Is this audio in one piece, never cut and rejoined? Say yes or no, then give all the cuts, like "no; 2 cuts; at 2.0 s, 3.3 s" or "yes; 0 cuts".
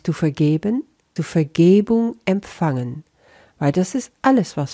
no; 1 cut; at 1.2 s